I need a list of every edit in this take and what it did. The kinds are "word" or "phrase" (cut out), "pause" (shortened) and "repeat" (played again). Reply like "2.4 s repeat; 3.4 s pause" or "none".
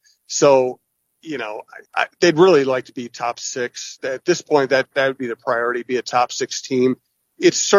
1.9 s pause